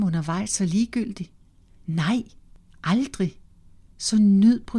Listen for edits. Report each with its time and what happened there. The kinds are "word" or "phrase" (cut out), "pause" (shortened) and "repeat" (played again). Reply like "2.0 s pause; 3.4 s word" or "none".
none